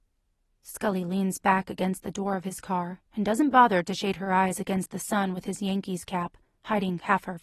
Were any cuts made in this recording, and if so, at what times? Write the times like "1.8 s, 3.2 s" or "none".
3.1 s